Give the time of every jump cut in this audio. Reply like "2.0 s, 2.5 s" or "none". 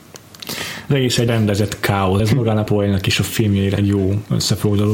1.3 s, 2.2 s, 2.7 s, 3.8 s